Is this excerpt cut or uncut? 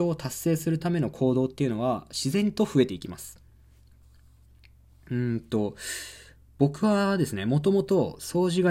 uncut